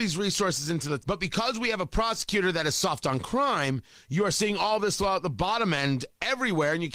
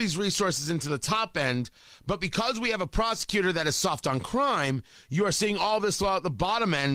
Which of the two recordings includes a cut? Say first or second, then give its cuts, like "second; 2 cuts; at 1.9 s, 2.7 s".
first; 1 cut; at 1.0 s